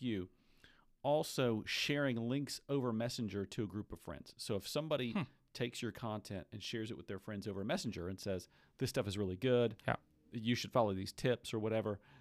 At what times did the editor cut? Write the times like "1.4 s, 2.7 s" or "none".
none